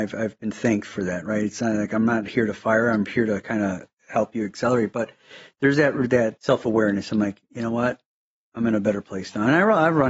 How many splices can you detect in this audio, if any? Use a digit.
0